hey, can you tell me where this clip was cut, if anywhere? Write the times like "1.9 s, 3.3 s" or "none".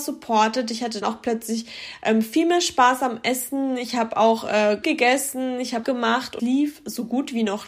1.0 s, 4.8 s, 5.8 s, 6.4 s